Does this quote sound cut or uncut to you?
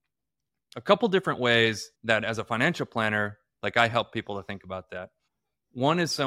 cut